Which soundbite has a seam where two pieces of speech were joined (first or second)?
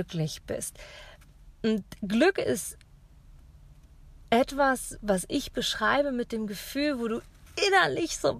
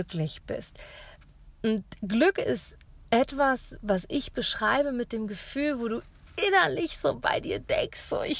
second